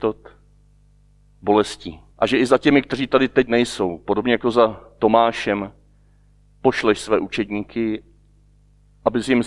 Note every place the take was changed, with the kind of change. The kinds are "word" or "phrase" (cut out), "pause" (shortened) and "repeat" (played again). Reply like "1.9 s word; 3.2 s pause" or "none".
2.1 s pause